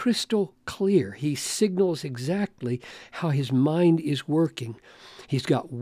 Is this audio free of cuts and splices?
yes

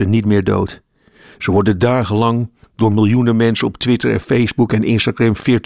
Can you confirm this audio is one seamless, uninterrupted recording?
yes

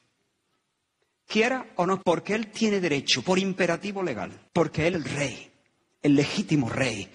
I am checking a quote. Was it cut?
yes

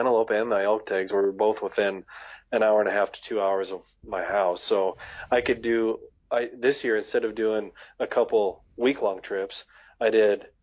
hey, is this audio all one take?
yes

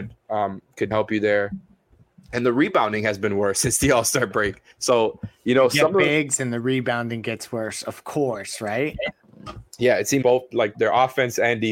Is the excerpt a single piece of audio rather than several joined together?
no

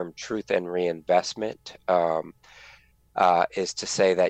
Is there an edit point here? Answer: no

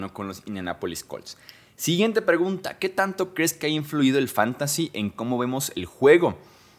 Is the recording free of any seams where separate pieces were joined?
yes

